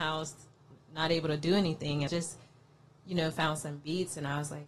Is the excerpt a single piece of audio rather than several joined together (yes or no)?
no